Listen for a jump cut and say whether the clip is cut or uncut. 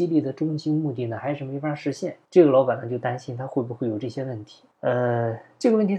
cut